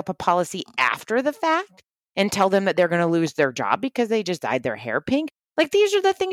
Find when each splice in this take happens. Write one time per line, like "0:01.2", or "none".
none